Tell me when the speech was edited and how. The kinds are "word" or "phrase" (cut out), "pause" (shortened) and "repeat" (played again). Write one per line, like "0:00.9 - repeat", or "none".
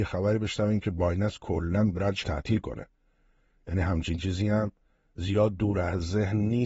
0:02.2 - word